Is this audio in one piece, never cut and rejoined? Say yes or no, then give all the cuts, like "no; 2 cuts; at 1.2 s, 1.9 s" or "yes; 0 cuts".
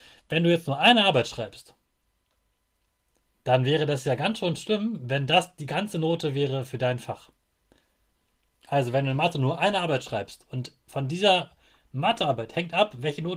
yes; 0 cuts